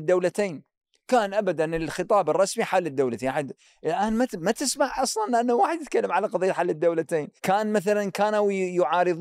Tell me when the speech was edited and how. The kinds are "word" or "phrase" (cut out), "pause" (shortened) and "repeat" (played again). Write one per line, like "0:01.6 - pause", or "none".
0:07.4 - pause